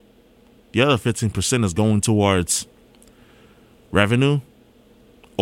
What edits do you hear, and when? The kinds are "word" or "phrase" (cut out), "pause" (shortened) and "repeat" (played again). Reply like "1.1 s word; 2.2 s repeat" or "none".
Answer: none